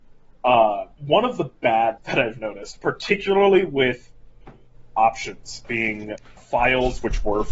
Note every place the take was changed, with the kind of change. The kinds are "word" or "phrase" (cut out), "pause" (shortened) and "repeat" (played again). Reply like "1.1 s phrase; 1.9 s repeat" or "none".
1.0 s word; 2.0 s word; 5.6 s word; 6.4 s word